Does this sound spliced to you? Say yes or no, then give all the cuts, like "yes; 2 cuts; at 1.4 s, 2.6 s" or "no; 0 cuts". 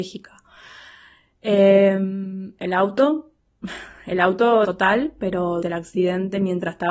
yes; 2 cuts; at 4.6 s, 5.6 s